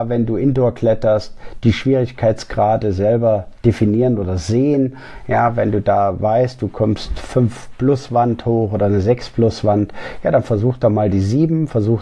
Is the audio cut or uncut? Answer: uncut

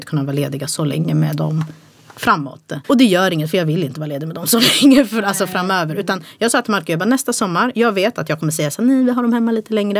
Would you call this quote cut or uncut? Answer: cut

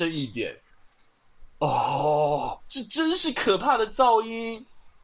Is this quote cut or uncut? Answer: cut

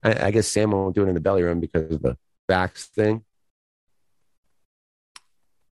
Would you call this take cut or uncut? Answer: uncut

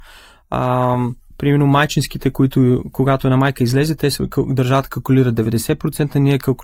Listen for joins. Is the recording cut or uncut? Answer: uncut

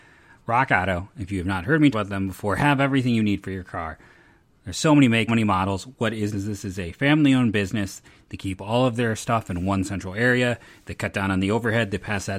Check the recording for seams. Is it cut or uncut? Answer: cut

